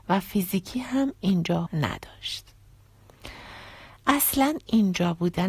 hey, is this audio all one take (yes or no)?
no